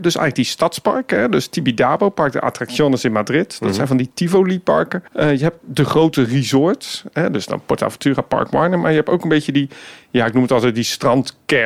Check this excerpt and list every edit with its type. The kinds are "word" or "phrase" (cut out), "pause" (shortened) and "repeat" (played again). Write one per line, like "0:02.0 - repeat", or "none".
0:05.1 - pause